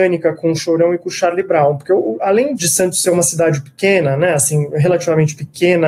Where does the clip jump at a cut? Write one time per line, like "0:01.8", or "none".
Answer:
0:02.6